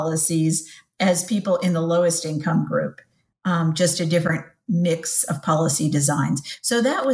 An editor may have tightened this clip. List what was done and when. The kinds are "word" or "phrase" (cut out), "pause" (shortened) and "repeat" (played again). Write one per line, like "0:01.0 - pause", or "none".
none